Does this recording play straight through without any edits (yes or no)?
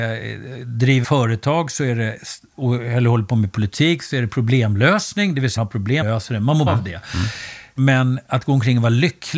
no